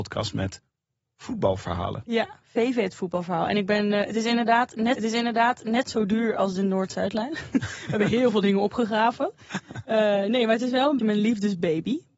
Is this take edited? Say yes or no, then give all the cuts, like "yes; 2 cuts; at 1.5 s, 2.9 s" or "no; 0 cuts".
yes; 2 cuts; at 5.0 s, 11.0 s